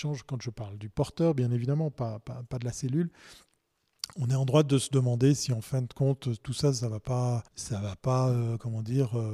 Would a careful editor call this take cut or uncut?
cut